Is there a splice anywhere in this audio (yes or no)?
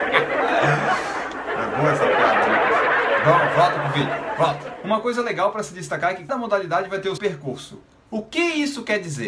yes